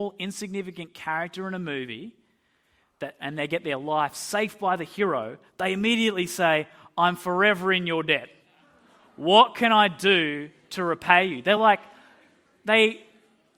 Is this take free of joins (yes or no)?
yes